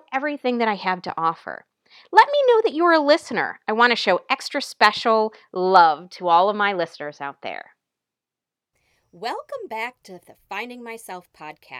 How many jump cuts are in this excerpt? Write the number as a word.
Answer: zero